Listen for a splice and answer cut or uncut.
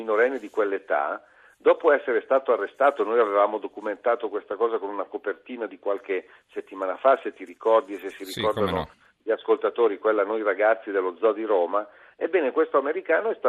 uncut